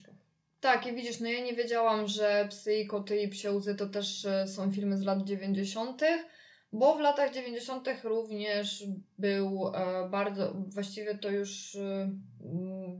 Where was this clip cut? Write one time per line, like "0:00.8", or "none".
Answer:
none